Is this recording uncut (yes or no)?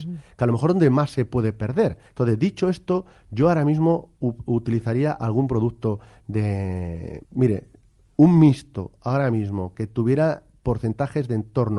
no